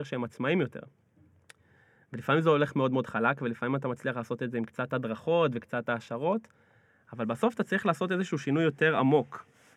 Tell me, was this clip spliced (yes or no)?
no